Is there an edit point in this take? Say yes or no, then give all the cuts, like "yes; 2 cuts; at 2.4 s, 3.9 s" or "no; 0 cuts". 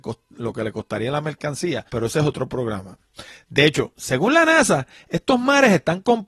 yes; 1 cut; at 1.9 s